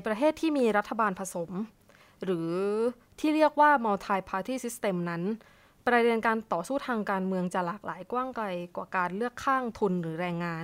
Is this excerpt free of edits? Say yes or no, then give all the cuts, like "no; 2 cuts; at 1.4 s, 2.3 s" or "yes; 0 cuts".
yes; 0 cuts